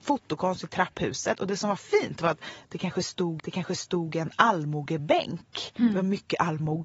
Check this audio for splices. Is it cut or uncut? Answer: cut